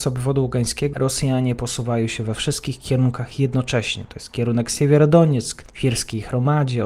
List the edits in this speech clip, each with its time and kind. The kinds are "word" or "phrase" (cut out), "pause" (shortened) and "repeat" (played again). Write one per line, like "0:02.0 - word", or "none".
0:00.9 - phrase